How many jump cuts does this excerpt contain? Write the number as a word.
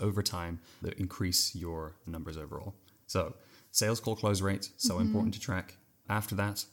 zero